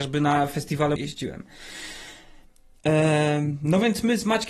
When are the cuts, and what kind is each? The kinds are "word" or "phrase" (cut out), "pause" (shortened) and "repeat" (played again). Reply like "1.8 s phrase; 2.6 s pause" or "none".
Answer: 1.0 s word